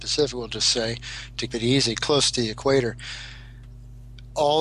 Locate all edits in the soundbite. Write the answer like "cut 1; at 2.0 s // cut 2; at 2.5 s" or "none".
cut 1; at 1.5 s // cut 2; at 2.3 s